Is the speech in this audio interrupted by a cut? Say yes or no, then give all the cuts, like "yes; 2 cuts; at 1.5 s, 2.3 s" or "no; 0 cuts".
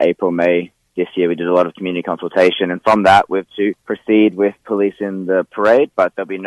yes; 2 cuts; at 3.5 s, 3.8 s